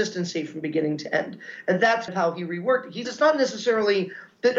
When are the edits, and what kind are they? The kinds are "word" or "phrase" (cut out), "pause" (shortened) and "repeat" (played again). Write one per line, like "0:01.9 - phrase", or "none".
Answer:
0:02.1 - word
0:03.0 - word